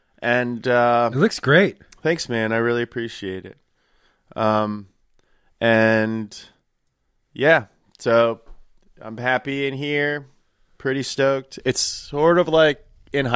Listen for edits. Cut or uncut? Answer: uncut